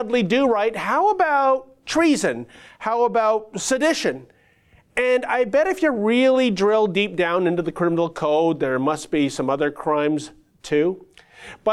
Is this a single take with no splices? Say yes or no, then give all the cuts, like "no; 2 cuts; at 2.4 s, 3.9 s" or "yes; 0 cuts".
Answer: yes; 0 cuts